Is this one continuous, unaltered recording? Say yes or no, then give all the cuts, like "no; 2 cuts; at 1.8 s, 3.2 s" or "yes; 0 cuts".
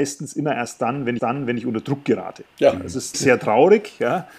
no; 3 cuts; at 1.2 s, 2.5 s, 3.1 s